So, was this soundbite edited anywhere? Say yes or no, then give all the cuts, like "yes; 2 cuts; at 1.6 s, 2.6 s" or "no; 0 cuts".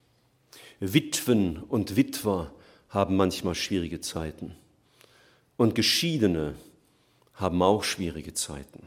no; 0 cuts